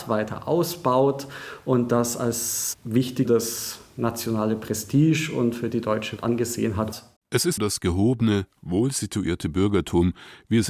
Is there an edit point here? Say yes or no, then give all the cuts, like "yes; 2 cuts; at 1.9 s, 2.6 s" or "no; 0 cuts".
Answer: yes; 4 cuts; at 3.2 s, 6.2 s, 7.2 s, 7.6 s